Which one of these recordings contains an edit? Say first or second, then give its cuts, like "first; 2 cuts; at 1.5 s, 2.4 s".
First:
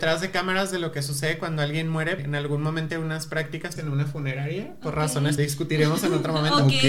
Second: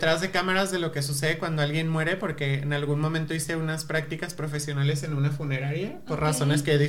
first; 4 cuts; at 2.2 s, 2.9 s, 3.8 s, 5.4 s